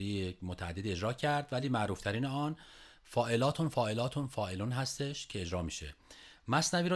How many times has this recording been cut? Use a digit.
0